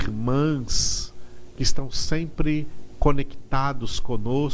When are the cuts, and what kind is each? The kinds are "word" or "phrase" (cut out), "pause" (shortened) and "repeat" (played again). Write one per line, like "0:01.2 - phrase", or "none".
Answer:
none